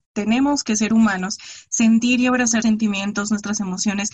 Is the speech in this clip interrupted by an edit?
yes; 1 cut; at 2.6 s

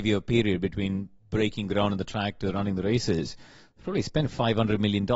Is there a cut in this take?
no; 0 cuts

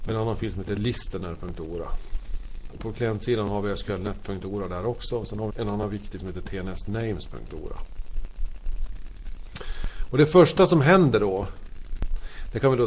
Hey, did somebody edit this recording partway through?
yes; 2 cuts; at 5.5 s, 6.2 s

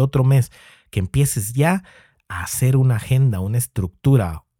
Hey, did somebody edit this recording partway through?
no; 0 cuts

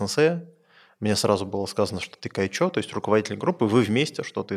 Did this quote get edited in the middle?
no; 0 cuts

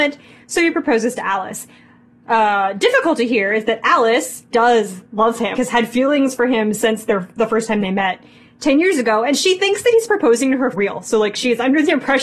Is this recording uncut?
no; 3 cuts; at 4.5 s, 5.6 s, 10.7 s

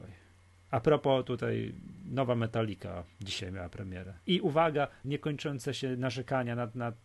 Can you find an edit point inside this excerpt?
yes; 2 cuts; at 4.2 s, 5.0 s

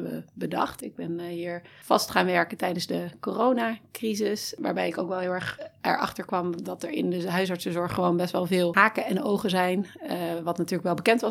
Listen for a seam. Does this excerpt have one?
no; 0 cuts

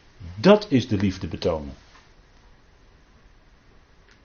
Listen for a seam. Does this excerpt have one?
no; 0 cuts

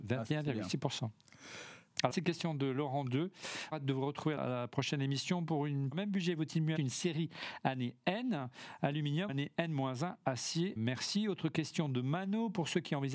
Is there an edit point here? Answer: yes; 7 cuts; at 2.1 s, 3.7 s, 4.4 s, 5.9 s, 6.8 s, 9.3 s, 10.8 s

